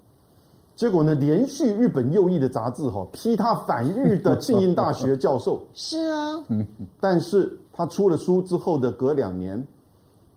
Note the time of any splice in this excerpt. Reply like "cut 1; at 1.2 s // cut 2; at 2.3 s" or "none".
cut 1; at 7.6 s